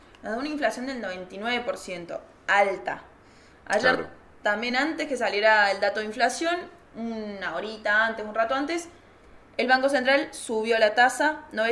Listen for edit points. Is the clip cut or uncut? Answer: uncut